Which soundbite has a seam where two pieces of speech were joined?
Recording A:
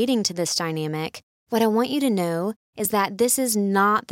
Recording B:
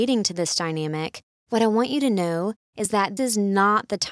B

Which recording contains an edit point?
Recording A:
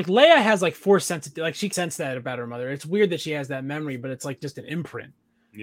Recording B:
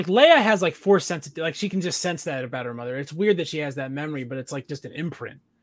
A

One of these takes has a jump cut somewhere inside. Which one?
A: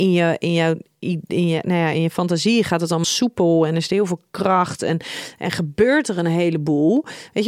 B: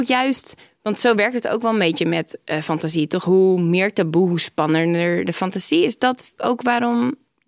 A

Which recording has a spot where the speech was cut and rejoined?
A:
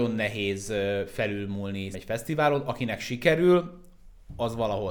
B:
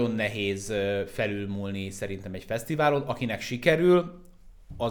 A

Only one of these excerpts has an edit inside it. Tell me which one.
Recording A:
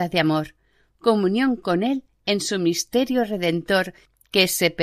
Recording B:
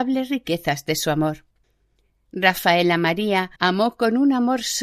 B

